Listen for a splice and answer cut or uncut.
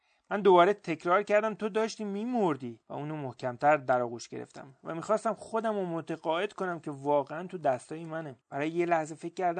cut